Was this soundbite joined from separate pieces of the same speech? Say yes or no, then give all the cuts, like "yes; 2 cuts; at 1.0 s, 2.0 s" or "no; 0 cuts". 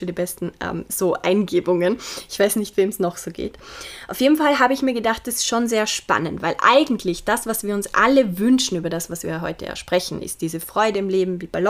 no; 0 cuts